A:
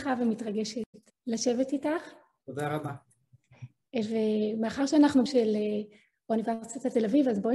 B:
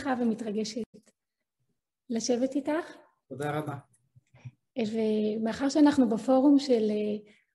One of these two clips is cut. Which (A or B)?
A